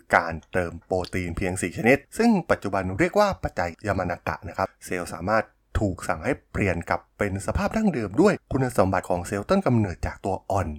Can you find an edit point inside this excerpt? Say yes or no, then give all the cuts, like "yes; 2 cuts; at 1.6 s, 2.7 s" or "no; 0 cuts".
no; 0 cuts